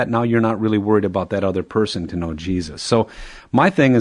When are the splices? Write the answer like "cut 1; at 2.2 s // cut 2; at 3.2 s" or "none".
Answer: cut 1; at 2.1 s